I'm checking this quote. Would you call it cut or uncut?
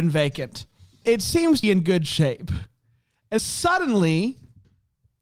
cut